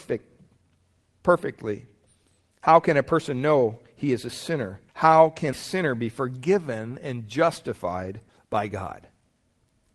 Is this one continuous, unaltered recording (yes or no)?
no